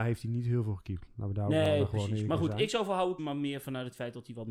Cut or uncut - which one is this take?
cut